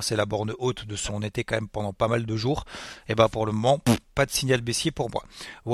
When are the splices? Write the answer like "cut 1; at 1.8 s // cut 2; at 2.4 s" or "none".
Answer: cut 1; at 1.1 s